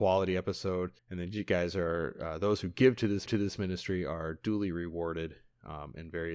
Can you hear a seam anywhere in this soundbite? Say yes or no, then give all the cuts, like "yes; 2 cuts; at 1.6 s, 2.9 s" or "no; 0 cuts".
yes; 2 cuts; at 1.0 s, 3.3 s